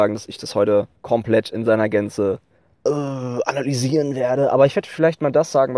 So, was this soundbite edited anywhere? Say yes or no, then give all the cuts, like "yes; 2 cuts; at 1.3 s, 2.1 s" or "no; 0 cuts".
yes; 2 cuts; at 1.0 s, 2.6 s